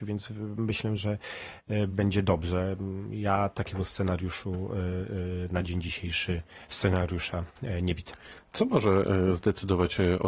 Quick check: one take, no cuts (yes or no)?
no